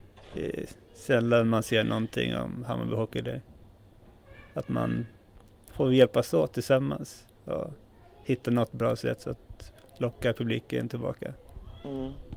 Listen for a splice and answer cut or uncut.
uncut